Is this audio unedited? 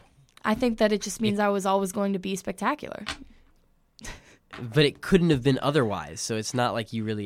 yes; 0 cuts

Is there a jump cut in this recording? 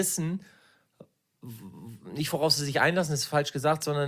no; 0 cuts

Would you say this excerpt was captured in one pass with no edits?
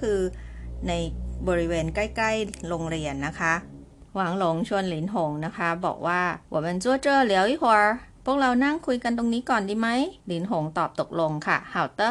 no; 4 cuts; at 4.1 s, 6.4 s, 8.1 s, 10.2 s

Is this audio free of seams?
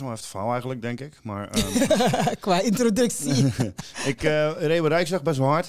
yes; 0 cuts

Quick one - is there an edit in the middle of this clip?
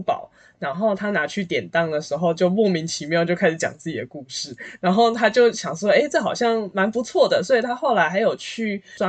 no; 0 cuts

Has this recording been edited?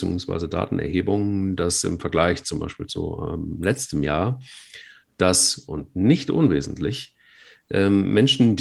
no; 0 cuts

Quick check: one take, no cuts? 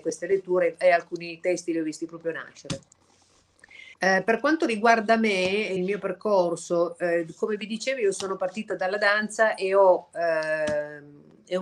no; 2 cuts; at 3.9 s, 5.8 s

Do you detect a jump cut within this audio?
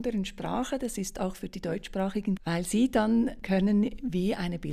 yes; 2 cuts; at 2.4 s, 3.4 s

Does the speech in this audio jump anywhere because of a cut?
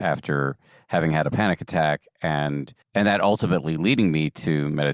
yes; 1 cut; at 2.8 s

